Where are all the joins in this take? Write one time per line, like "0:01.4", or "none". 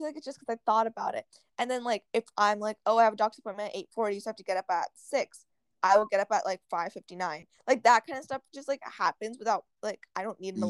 0:02.1